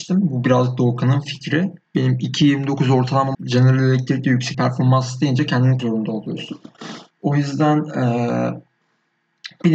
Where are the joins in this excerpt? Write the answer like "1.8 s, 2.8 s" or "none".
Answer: 1.8 s, 3.3 s, 4.5 s, 5.8 s, 7.1 s